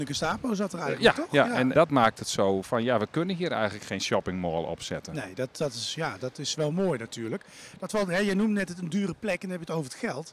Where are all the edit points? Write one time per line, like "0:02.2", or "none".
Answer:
0:01.7